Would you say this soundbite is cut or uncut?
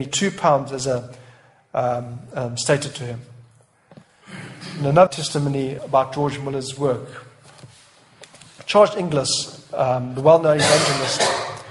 cut